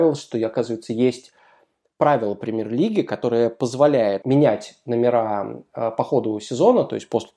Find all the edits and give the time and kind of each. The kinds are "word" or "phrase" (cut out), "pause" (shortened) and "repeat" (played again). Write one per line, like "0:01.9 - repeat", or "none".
none